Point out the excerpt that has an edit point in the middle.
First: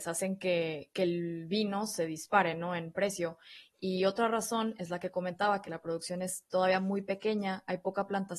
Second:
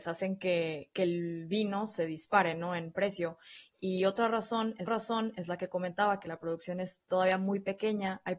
second; 1 cut; at 4.9 s

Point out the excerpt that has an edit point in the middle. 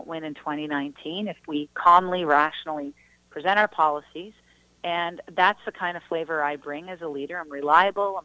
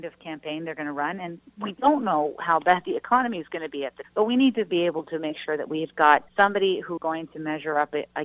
second; 3 cuts; at 4.0 s, 6.3 s, 7.0 s

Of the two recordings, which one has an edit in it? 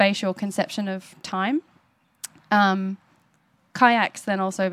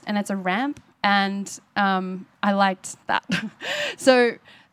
second; 2 cuts; at 0.9 s, 3.0 s

